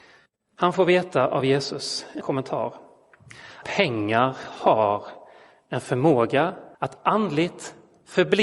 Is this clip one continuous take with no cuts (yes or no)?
no